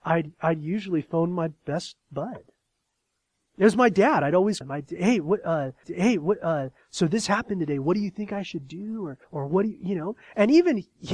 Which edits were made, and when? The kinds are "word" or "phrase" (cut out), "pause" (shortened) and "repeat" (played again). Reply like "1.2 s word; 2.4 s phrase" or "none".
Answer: 4.6 s word; 5.8 s repeat; 9.2 s pause